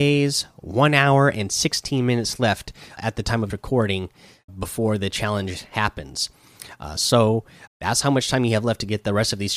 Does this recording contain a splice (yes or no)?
yes